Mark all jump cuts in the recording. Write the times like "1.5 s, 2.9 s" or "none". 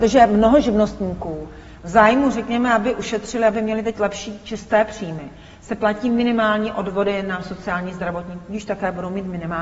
none